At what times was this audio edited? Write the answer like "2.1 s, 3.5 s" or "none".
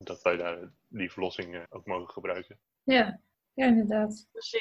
none